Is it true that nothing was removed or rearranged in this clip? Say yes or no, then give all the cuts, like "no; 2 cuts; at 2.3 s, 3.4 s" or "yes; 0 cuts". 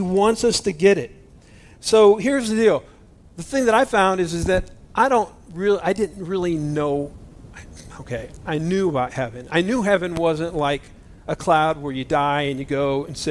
yes; 0 cuts